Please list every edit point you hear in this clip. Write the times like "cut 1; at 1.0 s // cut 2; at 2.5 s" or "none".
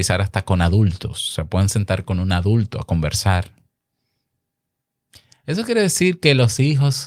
none